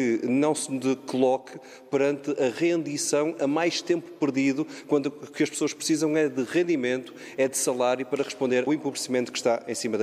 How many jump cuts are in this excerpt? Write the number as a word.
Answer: one